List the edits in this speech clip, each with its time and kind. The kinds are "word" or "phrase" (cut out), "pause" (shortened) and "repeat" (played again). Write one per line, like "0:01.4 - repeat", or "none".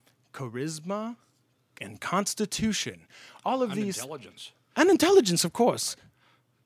none